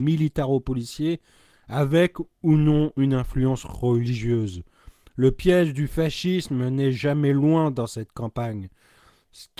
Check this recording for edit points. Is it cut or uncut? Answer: uncut